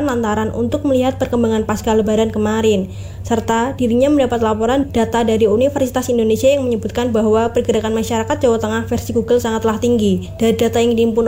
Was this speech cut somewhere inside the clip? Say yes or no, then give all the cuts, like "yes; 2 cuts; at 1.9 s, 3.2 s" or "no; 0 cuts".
no; 0 cuts